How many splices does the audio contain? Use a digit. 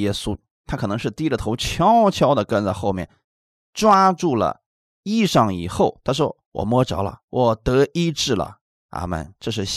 0